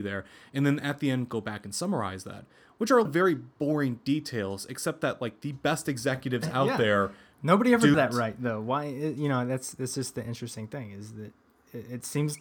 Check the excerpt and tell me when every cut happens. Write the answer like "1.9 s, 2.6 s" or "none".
3.0 s, 7.9 s